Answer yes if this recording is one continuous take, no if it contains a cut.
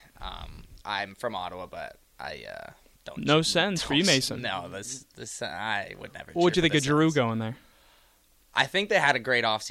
yes